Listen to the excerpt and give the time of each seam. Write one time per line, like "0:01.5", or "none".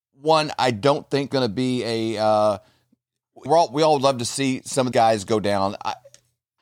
0:01.3
0:03.5
0:04.9